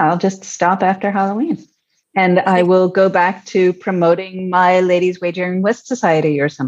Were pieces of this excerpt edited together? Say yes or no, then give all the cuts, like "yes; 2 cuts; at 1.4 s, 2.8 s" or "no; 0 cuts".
no; 0 cuts